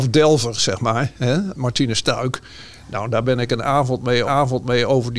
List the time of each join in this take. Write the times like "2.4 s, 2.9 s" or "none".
4.3 s